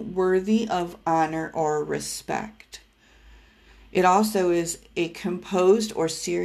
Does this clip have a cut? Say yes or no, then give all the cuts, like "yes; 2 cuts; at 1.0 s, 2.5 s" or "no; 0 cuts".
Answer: no; 0 cuts